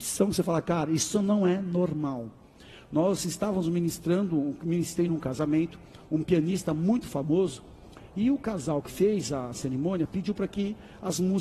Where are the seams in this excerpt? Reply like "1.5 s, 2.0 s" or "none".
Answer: none